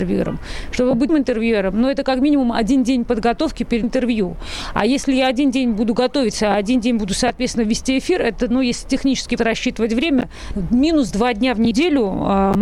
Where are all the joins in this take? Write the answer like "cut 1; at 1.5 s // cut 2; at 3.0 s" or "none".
cut 1; at 1.1 s // cut 2; at 3.8 s // cut 3; at 9.4 s